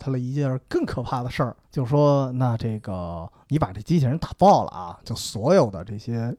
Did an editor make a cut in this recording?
yes; 1 cut; at 1.6 s

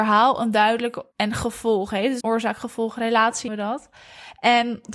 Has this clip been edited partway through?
yes; 3 cuts; at 1.1 s, 2.2 s, 3.5 s

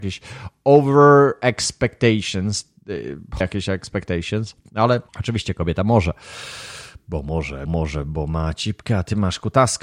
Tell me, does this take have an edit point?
yes; 3 cuts; at 3.4 s, 5.1 s, 7.7 s

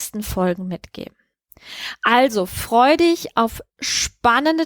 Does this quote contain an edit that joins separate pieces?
no; 0 cuts

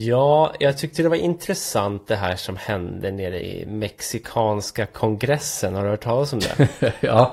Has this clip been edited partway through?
yes; 1 cut; at 3.4 s

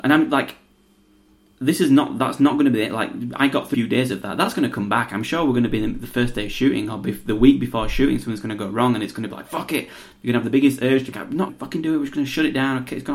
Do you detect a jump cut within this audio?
yes; 3 cuts; at 3.7 s, 11.1 s, 11.5 s

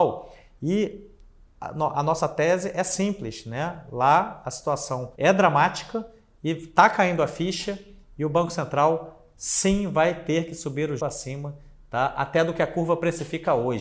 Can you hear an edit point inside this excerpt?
yes; 2 cuts; at 5.1 s, 11.0 s

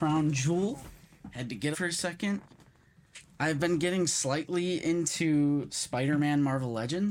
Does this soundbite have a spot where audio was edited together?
yes; 1 cut; at 1.7 s

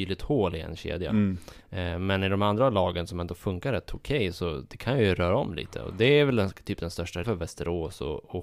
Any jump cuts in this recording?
yes; 1 cut; at 7.2 s

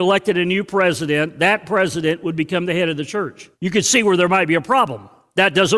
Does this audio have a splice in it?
yes; 1 cut; at 3.5 s

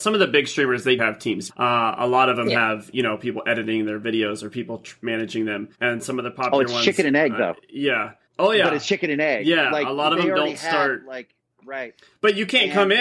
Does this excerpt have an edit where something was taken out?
yes; 5 cuts; at 1.0 s, 1.5 s, 5.7 s, 8.3 s, 11.5 s

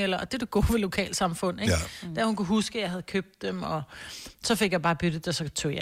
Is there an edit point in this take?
no; 0 cuts

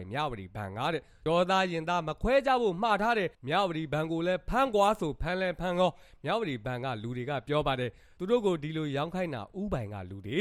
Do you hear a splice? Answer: yes; 1 cut; at 3.3 s

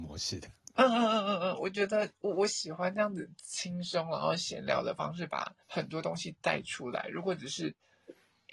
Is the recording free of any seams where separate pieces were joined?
no; 1 cut; at 5.6 s

